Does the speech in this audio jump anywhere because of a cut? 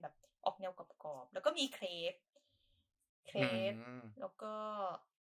no; 0 cuts

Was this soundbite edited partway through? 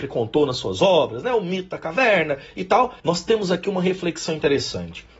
yes; 1 cut; at 3.0 s

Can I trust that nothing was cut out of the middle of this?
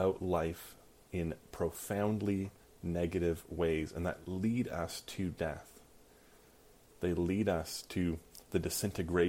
yes; 0 cuts

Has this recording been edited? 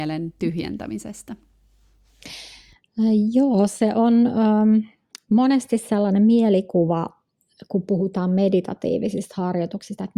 no; 0 cuts

